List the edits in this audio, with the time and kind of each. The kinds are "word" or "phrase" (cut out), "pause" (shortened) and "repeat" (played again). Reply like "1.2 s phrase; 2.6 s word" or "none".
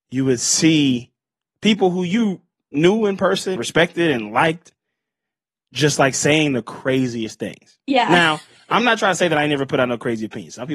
3.6 s word